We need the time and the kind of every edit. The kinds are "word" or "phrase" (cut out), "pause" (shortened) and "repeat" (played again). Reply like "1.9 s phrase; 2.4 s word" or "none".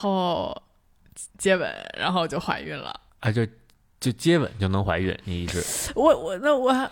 1.3 s pause; 3.1 s pause